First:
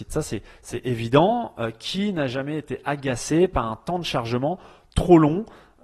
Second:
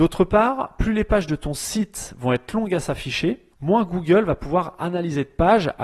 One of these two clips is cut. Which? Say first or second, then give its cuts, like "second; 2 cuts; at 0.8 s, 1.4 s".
second; 1 cut; at 3.5 s